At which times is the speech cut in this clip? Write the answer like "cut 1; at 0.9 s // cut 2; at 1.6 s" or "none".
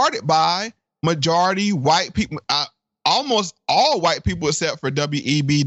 none